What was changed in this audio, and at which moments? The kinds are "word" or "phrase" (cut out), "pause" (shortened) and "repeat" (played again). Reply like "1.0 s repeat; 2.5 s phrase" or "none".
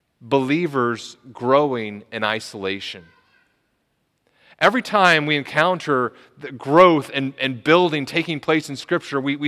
none